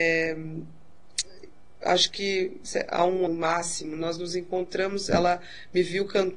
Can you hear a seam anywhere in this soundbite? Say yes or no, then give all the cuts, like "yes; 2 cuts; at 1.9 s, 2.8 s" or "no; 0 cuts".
yes; 1 cut; at 3.3 s